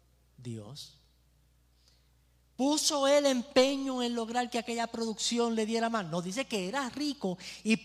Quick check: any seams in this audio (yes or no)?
no